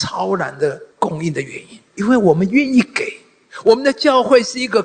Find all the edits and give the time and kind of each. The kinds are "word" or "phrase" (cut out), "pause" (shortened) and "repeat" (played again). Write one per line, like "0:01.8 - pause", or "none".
0:00.9 - pause
0:01.9 - pause